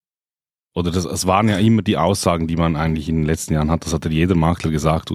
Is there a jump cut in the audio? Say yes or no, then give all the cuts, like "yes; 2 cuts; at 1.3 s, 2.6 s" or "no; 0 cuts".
no; 0 cuts